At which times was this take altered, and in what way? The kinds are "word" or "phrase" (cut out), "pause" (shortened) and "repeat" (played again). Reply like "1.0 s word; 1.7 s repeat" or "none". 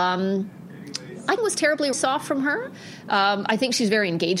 1.4 s phrase; 1.9 s phrase